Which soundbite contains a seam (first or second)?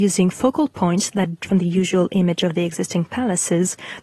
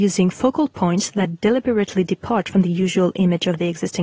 first